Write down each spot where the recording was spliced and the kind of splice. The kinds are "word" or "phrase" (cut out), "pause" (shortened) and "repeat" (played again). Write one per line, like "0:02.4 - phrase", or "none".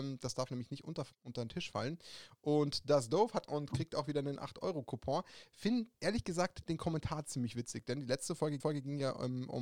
0:01.1 - word
0:03.5 - word
0:05.9 - pause
0:08.6 - repeat